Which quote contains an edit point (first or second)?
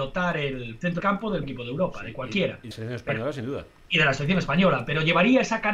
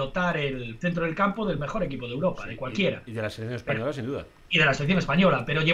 first